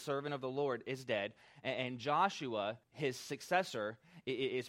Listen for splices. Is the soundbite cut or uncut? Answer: cut